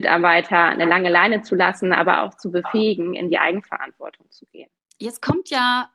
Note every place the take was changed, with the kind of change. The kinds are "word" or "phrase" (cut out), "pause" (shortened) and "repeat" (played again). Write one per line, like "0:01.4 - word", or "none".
0:04.8 - pause